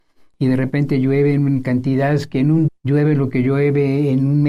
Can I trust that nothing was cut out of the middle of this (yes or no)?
no